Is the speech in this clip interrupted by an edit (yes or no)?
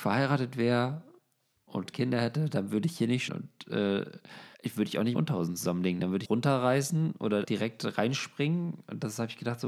yes